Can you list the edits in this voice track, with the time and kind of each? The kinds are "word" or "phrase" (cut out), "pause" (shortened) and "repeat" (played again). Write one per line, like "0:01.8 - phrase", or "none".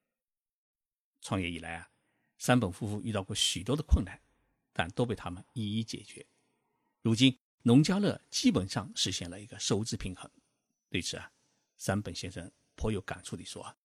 none